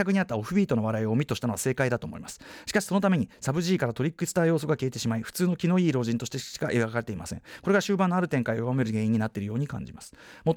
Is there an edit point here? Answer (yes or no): no